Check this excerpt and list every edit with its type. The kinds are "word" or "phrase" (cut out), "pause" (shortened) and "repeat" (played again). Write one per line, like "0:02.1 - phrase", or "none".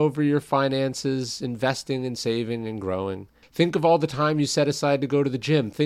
0:03.4 - pause